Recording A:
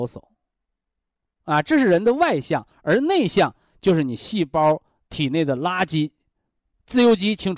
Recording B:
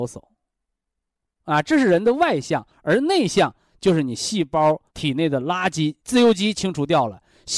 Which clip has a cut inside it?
B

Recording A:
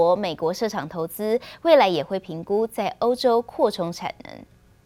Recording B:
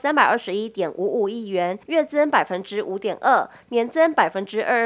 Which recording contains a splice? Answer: B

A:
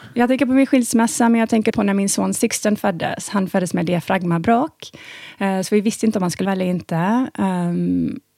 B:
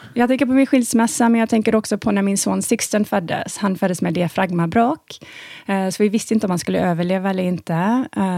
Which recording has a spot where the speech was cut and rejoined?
A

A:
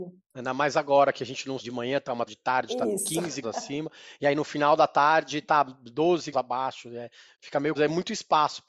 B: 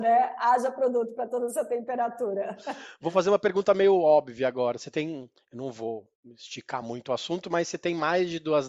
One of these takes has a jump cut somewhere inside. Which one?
A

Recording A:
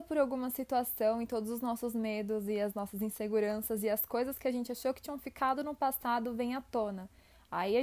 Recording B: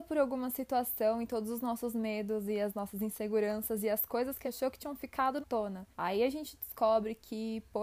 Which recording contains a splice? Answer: B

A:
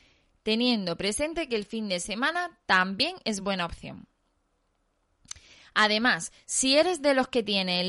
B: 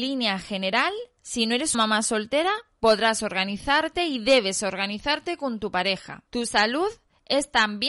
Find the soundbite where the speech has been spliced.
B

